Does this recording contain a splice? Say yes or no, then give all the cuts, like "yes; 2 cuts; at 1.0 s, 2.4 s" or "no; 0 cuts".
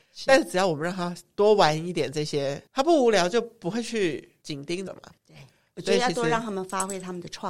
yes; 3 cuts; at 2.7 s, 4.9 s, 5.2 s